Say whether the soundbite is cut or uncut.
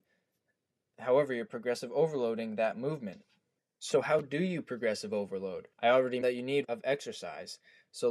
cut